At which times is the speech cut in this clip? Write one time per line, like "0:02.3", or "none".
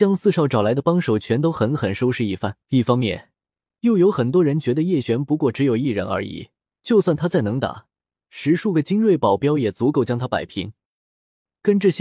0:02.6
0:06.7

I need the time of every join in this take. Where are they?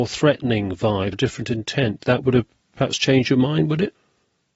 0:01.1

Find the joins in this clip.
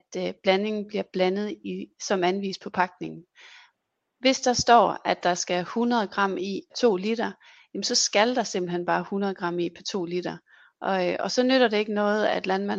0:06.7

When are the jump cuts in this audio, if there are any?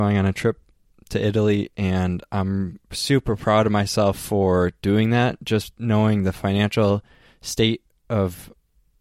0:02.8

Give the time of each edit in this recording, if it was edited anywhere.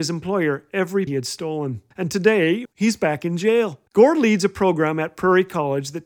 0:01.1
0:01.9
0:02.7
0:03.9

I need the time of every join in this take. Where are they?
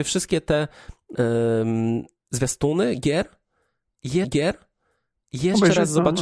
0:01.1
0:04.2

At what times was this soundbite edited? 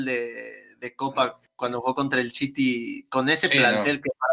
none

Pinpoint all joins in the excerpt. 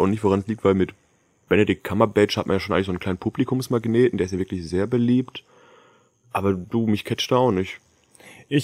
none

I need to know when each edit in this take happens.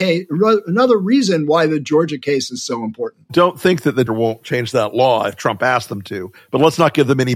0:04.1

